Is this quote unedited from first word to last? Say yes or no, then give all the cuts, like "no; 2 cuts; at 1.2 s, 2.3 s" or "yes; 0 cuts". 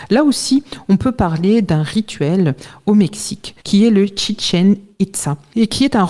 no; 1 cut; at 3.6 s